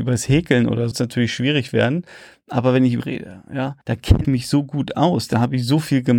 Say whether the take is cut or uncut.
cut